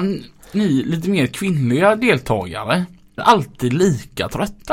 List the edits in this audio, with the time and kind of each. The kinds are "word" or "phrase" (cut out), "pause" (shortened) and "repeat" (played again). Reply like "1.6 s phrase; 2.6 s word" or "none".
3.2 s word